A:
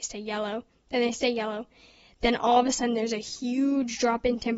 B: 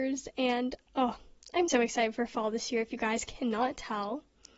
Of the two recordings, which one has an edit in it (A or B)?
B